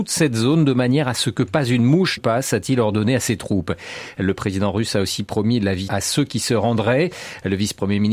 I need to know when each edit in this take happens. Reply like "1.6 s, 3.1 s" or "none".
2.2 s, 5.9 s